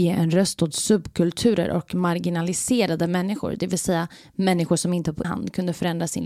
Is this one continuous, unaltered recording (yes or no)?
no